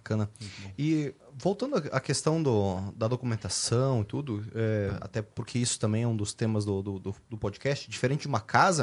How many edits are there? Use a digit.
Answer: 1